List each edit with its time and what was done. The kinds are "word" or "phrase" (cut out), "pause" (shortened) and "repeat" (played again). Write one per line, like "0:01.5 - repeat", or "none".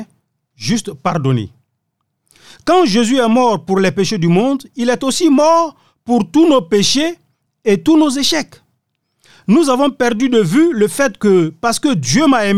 none